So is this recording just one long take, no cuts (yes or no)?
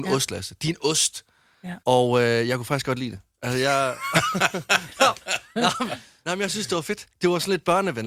no